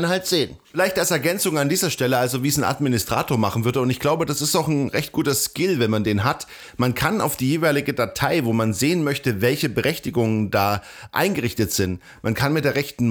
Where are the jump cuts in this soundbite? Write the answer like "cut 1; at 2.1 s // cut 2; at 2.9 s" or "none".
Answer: none

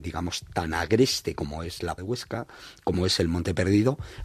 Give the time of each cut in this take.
cut 1; at 2.0 s

